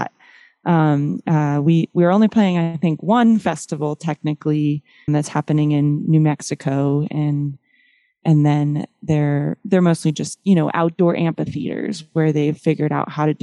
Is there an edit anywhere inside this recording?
yes; 1 cut; at 5.1 s

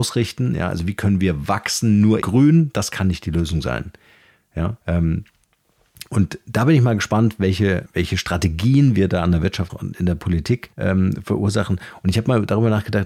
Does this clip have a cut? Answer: yes; 5 cuts; at 2.2 s, 4.8 s, 7.9 s, 9.7 s, 10.7 s

